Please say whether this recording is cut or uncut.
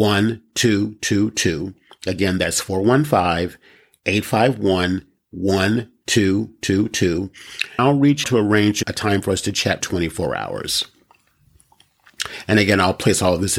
cut